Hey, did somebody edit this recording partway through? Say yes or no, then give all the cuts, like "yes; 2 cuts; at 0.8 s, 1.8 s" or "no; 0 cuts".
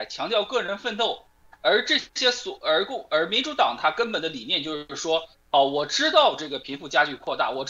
no; 0 cuts